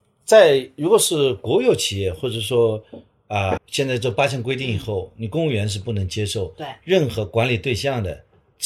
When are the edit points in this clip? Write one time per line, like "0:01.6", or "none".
0:03.6